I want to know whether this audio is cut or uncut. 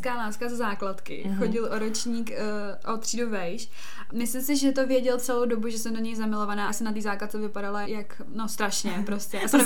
cut